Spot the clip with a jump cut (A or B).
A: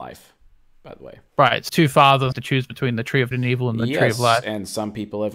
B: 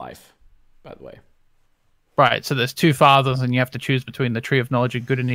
A